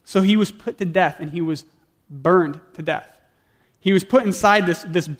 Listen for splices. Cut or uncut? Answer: uncut